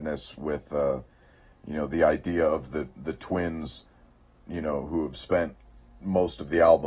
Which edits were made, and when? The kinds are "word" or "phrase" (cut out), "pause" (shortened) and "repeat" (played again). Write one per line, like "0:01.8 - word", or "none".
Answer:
none